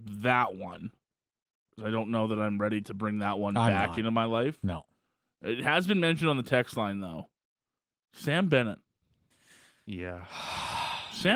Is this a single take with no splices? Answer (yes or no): yes